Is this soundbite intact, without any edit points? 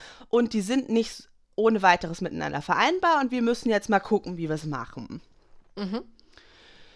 yes; 0 cuts

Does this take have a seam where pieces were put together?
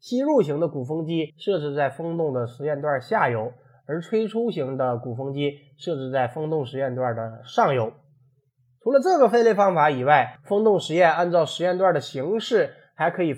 yes; 1 cut; at 1.3 s

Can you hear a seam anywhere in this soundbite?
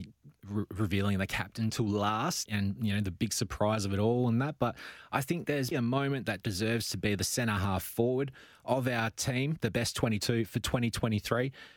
yes; 2 cuts; at 2.5 s, 5.7 s

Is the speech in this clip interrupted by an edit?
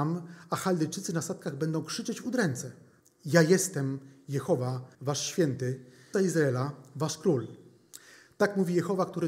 yes; 3 cuts; at 3.0 s, 4.9 s, 6.1 s

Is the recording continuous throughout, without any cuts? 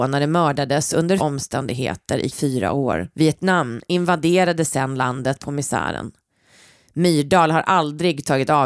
no; 4 cuts; at 1.2 s, 2.3 s, 3.1 s, 5.4 s

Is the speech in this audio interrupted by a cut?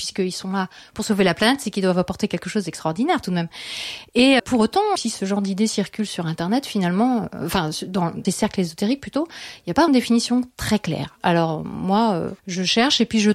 yes; 5 cuts; at 4.4 s, 5.0 s, 8.2 s, 9.9 s, 12.4 s

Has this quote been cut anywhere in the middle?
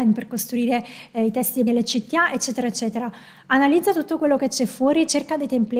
yes; 1 cut; at 1.7 s

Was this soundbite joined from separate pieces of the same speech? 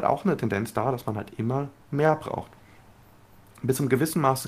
no; 0 cuts

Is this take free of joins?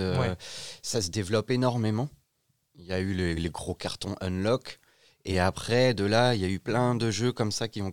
yes; 0 cuts

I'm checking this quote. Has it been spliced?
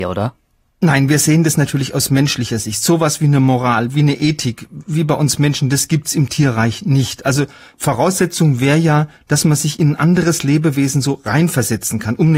no; 0 cuts

